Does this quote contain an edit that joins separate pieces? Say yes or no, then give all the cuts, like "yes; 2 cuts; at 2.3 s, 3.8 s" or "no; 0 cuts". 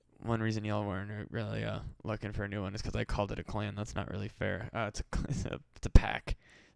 no; 0 cuts